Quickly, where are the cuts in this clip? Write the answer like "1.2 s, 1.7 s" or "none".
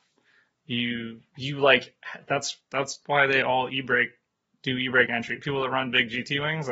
none